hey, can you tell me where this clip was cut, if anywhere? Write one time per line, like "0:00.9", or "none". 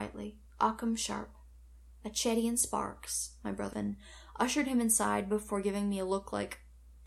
0:03.7